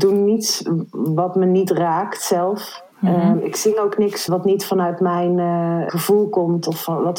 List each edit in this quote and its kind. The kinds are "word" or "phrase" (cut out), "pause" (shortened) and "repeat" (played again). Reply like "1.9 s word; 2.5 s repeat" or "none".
2.9 s pause; 4.3 s word; 5.9 s word